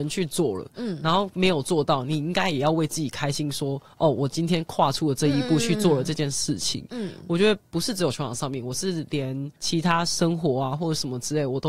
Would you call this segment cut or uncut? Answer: cut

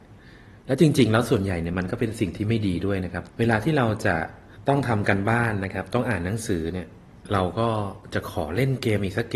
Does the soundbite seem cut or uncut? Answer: cut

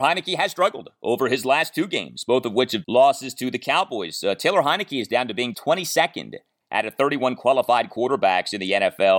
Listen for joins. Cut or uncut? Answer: cut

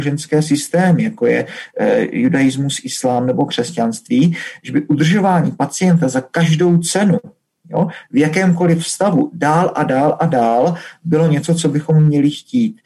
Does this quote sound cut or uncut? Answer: uncut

